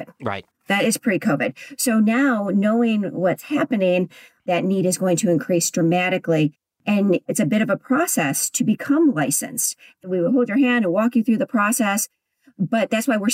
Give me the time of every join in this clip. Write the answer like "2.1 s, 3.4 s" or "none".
none